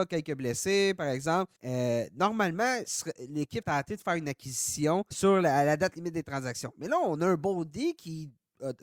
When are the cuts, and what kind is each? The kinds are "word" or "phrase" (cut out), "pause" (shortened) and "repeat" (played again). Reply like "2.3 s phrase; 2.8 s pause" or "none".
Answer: 1.6 s pause; 3.6 s word; 5.1 s word